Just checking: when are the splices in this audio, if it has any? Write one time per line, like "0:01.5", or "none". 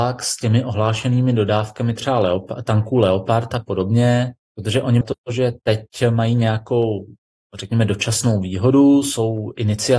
0:04.4
0:05.0